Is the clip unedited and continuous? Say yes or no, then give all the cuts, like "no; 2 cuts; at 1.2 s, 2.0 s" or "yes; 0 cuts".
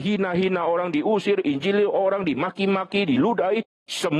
yes; 0 cuts